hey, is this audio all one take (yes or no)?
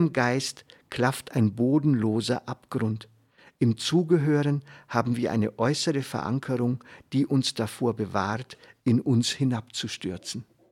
yes